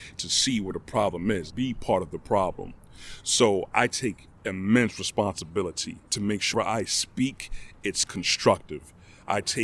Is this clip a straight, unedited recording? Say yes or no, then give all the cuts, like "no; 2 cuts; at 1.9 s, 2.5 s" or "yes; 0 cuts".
no; 3 cuts; at 1.5 s, 6.1 s, 6.5 s